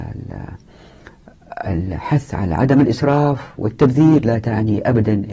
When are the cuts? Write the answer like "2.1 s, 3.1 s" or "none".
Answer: none